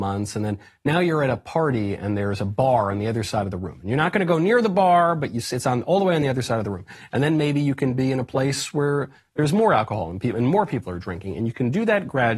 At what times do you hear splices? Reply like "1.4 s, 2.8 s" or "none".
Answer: none